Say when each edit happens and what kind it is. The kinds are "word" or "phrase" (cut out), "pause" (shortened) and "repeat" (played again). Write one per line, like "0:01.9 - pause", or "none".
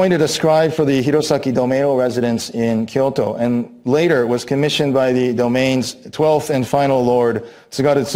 none